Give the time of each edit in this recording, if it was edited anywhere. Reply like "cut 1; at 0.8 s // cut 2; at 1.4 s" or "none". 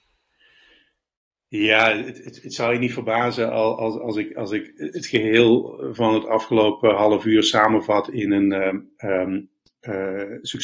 none